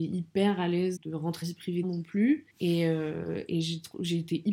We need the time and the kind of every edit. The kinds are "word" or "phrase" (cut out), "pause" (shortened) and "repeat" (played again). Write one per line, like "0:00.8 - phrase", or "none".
0:01.0 - word
0:01.4 - phrase
0:01.8 - phrase
0:02.5 - pause